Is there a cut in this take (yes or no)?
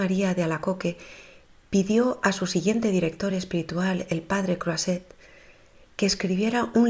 no